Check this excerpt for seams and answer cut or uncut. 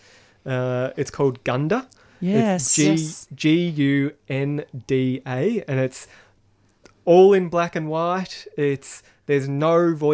uncut